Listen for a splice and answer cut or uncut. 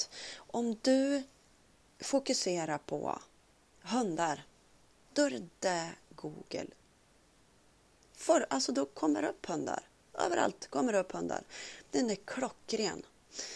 uncut